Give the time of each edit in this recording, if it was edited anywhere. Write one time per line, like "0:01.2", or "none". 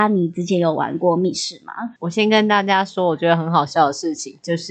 0:02.0